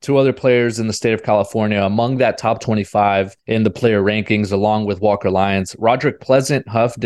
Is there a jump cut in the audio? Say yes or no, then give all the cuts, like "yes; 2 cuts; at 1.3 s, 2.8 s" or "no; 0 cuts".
no; 0 cuts